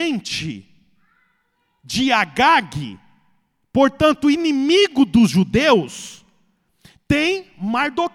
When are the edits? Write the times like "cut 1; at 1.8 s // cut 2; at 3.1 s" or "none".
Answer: none